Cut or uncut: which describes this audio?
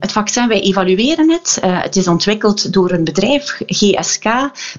uncut